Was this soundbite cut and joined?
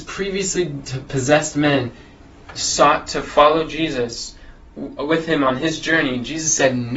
no; 0 cuts

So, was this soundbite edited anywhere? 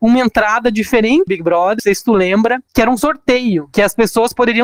yes; 2 cuts; at 1.3 s, 1.8 s

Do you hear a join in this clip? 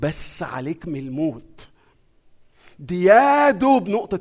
no; 0 cuts

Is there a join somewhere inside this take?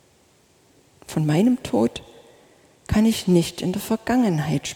no; 0 cuts

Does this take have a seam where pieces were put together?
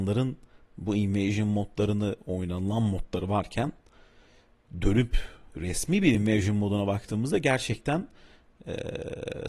no; 0 cuts

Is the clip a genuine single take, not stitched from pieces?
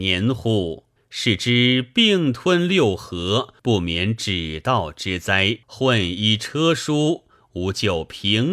no; 3 cuts; at 1.0 s, 3.6 s, 5.6 s

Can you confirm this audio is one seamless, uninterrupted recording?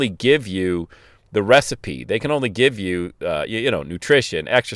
yes; 0 cuts

